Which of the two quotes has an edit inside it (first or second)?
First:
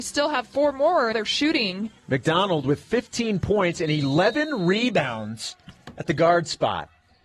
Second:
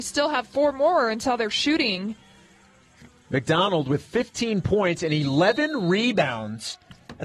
first